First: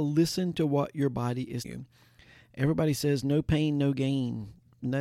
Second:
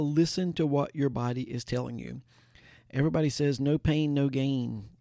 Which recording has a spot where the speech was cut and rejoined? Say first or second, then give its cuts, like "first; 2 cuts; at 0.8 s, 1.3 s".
first; 1 cut; at 1.6 s